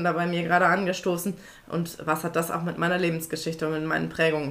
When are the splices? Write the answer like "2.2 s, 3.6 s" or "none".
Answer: none